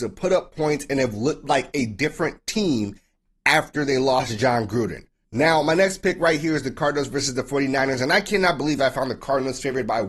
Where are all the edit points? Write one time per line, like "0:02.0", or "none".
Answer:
none